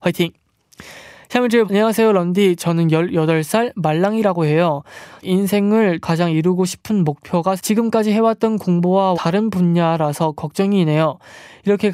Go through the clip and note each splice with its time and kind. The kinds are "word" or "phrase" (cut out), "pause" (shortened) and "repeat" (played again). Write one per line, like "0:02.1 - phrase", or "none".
0:01.7 - word
0:05.2 - word
0:06.0 - word
0:07.6 - word
0:09.1 - word